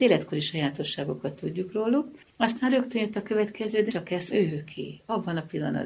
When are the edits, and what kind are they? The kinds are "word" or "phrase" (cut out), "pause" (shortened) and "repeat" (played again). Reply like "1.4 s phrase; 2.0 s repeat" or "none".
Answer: 3.9 s word; 4.3 s word